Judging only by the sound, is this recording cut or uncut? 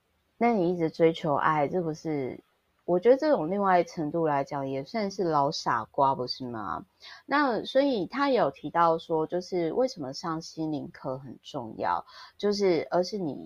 uncut